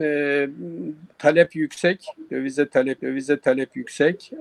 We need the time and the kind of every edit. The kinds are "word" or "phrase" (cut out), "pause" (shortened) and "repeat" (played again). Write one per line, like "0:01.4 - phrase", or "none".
0:01.1 - pause
0:03.0 - repeat